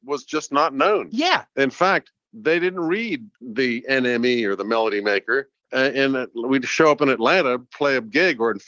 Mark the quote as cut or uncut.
uncut